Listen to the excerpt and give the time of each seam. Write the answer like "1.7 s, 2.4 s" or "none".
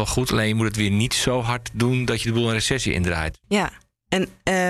none